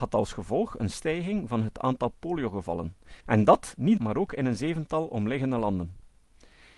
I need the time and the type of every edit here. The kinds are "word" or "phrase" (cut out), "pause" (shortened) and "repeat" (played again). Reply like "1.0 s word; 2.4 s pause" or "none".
0.9 s word; 3.2 s pause; 4.0 s phrase